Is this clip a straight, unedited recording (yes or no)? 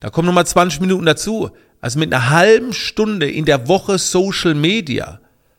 yes